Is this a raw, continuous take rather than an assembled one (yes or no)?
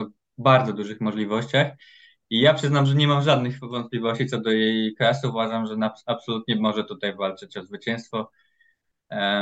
yes